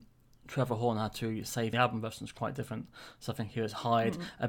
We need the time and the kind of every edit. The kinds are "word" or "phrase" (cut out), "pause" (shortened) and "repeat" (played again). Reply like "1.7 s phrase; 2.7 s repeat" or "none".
1.7 s phrase